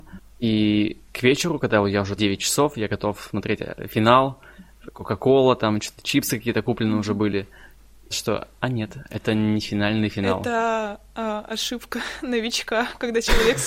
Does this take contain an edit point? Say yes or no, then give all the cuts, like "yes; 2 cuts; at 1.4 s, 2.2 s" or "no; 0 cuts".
yes; 2 cuts; at 2.2 s, 8.1 s